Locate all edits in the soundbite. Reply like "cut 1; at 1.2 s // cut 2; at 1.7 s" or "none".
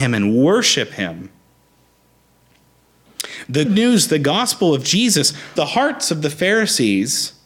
cut 1; at 3.6 s // cut 2; at 5.6 s